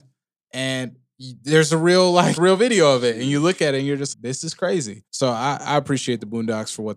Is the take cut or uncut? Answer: cut